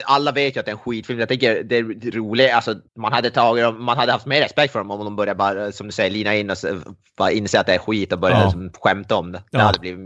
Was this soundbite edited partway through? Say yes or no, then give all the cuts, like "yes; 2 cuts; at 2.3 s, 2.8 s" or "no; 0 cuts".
yes; 1 cut; at 2.9 s